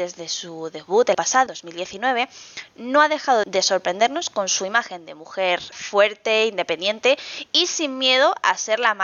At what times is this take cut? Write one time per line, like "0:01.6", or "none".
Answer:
0:01.1
0:01.5
0:03.4
0:05.7